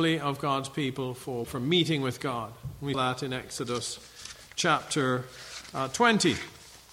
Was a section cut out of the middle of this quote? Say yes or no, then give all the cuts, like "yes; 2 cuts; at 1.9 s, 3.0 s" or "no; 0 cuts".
yes; 2 cuts; at 1.4 s, 2.9 s